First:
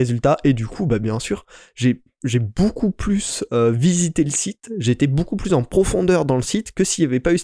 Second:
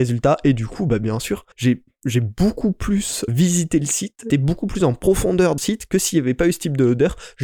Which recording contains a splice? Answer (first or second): second